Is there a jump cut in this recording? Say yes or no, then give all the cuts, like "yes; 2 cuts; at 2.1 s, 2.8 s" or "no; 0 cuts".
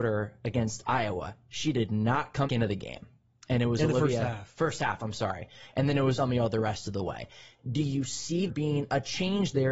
yes; 3 cuts; at 2.5 s, 6.2 s, 8.5 s